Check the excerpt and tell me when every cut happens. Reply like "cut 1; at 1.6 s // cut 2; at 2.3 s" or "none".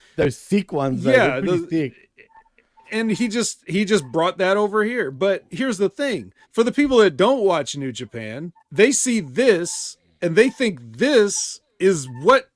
cut 1; at 6.4 s // cut 2; at 8.6 s